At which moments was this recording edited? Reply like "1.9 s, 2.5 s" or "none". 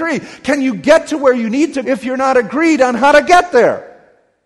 1.8 s